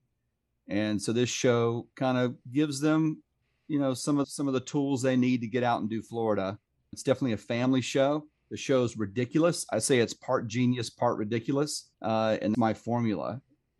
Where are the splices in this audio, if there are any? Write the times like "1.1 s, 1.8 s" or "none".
1.9 s, 2.4 s, 3.4 s, 4.2 s, 6.9 s, 11.9 s, 12.5 s